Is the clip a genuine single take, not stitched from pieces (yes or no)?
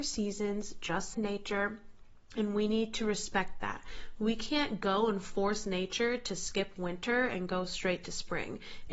no